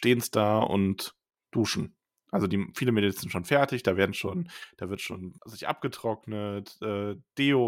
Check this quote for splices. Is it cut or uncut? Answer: uncut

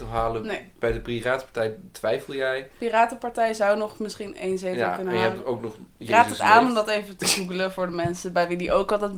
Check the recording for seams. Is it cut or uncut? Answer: uncut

